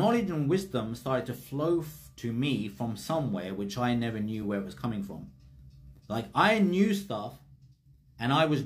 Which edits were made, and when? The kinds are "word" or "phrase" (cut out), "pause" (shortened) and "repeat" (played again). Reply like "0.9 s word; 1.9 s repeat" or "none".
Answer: none